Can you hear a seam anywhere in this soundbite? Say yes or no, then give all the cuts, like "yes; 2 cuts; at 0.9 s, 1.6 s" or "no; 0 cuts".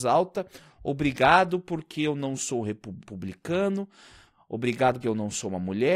yes; 2 cuts; at 3.0 s, 5.0 s